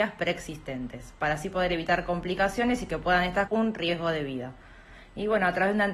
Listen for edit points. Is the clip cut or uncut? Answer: cut